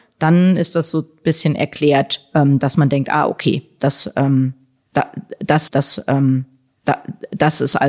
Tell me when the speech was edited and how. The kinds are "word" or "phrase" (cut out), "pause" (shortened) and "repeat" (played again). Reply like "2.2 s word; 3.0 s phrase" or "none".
5.7 s repeat